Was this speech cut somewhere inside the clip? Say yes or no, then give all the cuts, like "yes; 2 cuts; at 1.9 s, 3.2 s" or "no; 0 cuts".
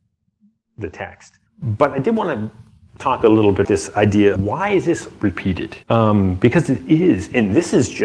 yes; 4 cuts; at 1.5 s, 3.6 s, 4.4 s, 5.8 s